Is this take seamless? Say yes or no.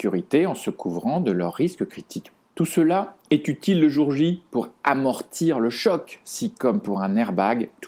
yes